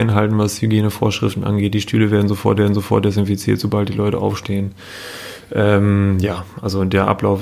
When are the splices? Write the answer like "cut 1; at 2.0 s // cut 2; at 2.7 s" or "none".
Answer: cut 1; at 2.6 s

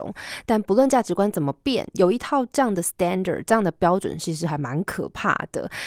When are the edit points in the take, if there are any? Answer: none

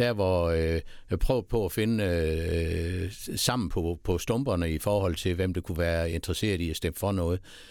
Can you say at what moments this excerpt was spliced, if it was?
none

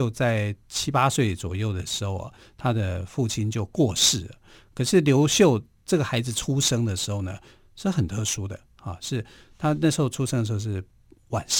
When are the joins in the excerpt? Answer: none

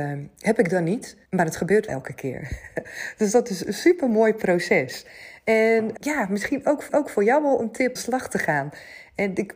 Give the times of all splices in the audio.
cut 1; at 1.3 s // cut 2; at 1.9 s // cut 3; at 6.0 s // cut 4; at 6.9 s // cut 5; at 8.0 s

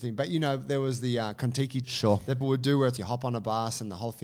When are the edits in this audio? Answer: cut 1; at 1.8 s // cut 2; at 2.4 s // cut 3; at 3.0 s

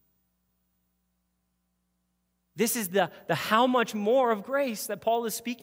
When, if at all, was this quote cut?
none

